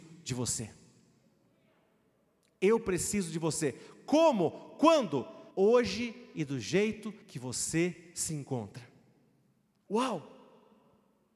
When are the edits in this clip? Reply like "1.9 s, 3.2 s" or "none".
5.5 s, 7.2 s